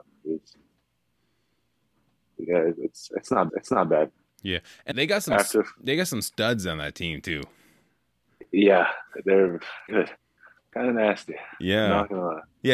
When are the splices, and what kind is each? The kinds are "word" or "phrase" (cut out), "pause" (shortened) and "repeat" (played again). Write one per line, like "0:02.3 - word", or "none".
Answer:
0:03.5 - repeat
0:04.9 - word
0:09.9 - word